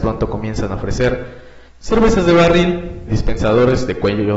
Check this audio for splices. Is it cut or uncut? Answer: cut